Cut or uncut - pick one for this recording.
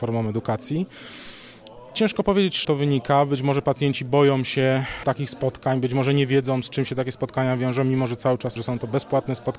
cut